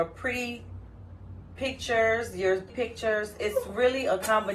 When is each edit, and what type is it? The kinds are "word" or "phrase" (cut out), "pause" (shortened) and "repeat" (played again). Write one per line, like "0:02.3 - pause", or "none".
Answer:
0:02.7 - word